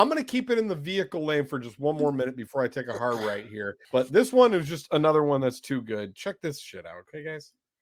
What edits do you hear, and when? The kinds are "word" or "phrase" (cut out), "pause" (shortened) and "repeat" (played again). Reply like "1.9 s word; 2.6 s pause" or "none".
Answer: 3.8 s pause